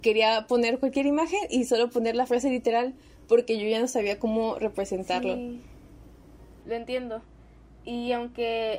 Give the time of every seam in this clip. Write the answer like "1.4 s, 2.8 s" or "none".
none